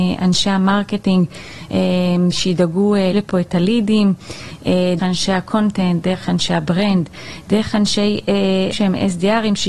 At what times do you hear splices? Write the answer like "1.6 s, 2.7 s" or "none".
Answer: 3.1 s, 5.0 s, 8.7 s